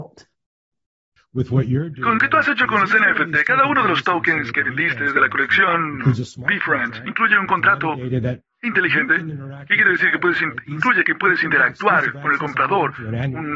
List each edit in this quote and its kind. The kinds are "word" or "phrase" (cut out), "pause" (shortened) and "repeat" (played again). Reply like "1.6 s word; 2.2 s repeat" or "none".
2.2 s word